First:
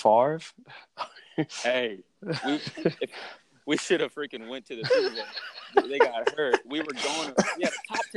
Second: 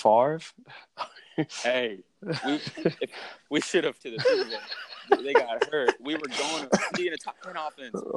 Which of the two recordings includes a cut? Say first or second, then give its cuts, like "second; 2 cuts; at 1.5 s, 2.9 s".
second; 3 cuts; at 3.4 s, 4.0 s, 6.9 s